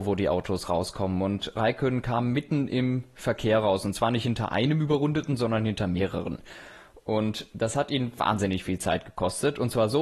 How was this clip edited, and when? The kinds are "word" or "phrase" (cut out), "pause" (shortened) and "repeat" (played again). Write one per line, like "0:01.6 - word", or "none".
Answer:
none